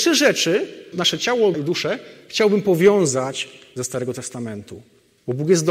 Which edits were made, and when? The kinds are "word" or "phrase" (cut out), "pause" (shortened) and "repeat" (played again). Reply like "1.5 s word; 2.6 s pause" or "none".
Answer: 0.9 s word; 1.5 s word; 3.8 s phrase